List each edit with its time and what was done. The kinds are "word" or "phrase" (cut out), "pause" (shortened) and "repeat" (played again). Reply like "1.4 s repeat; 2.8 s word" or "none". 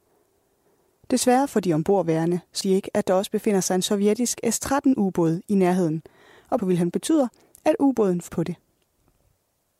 2.6 s word; 6.6 s word; 6.9 s word; 8.3 s word